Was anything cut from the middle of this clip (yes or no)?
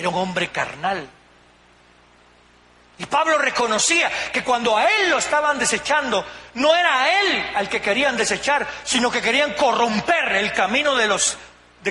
no